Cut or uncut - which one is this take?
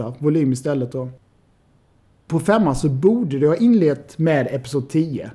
uncut